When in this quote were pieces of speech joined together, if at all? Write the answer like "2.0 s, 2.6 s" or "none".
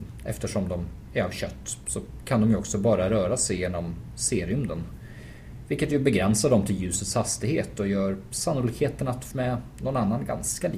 9.3 s